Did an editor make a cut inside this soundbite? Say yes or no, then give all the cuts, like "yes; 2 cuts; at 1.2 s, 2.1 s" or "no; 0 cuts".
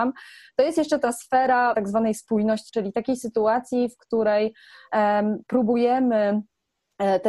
yes; 2 cuts; at 1.7 s, 2.7 s